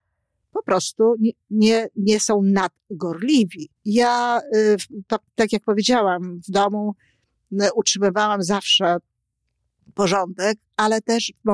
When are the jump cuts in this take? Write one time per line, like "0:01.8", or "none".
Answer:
0:03.8